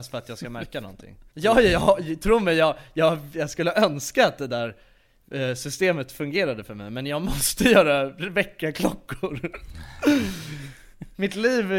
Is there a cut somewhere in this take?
yes; 1 cut; at 1.3 s

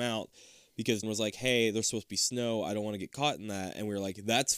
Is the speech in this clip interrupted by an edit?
yes; 1 cut; at 1.0 s

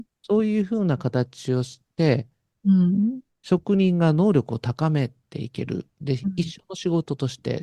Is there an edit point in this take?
yes; 1 cut; at 3.3 s

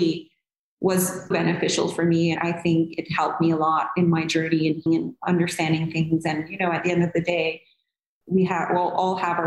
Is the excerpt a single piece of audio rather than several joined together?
no; 4 cuts; at 1.3 s, 2.4 s, 4.9 s, 8.2 s

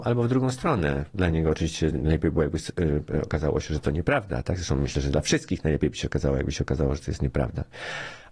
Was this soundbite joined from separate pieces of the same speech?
no; 0 cuts

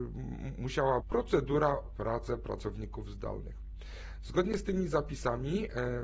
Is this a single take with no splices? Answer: no; 2 cuts; at 1.0 s, 1.8 s

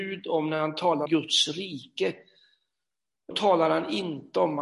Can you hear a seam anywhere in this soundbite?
yes; 2 cuts; at 1.1 s, 3.3 s

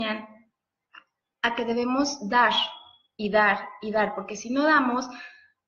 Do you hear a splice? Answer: no; 0 cuts

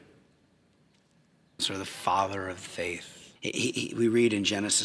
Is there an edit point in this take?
yes; 2 cuts; at 1.6 s, 3.4 s

